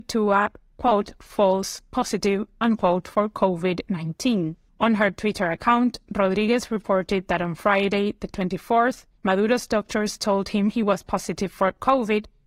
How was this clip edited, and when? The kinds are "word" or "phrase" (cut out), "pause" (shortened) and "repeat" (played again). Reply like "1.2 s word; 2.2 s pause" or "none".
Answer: 4.7 s pause; 9.2 s pause